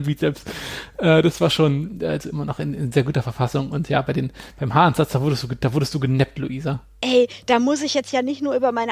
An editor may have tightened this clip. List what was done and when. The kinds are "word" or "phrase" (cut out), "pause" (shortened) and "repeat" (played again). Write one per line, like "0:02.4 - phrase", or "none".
none

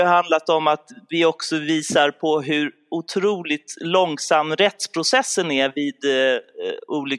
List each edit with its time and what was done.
none

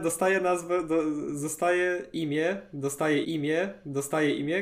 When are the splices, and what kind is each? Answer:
0:03.2 - repeat

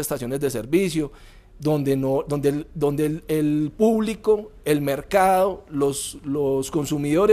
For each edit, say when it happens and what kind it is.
none

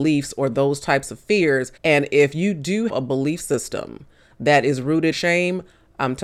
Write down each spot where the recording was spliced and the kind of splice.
0:01.8 - pause
0:02.9 - word
0:05.1 - phrase

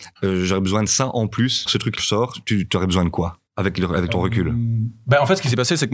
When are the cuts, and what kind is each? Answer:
0:01.7 - word
0:02.0 - phrase
0:03.5 - pause
0:04.1 - word

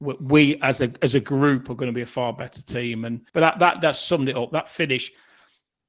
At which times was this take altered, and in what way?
0:03.3 - pause

